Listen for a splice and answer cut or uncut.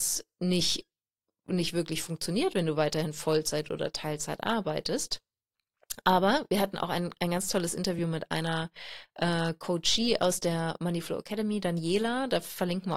uncut